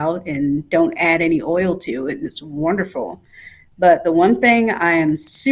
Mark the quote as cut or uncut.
uncut